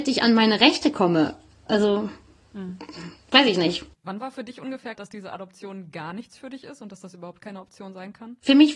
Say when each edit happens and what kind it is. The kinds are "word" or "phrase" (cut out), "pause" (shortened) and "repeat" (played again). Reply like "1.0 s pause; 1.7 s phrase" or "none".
4.9 s word